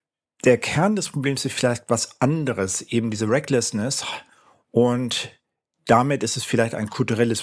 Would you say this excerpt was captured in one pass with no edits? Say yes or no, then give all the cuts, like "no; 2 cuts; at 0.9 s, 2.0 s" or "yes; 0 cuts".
yes; 0 cuts